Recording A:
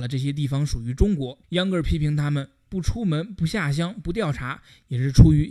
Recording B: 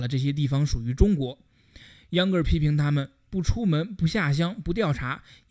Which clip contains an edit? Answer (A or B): A